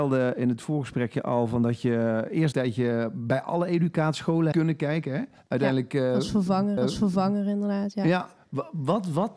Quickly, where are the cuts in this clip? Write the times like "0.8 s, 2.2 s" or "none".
2.5 s, 4.5 s, 5.4 s, 6.8 s, 8.4 s